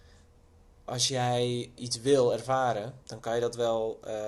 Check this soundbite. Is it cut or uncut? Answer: cut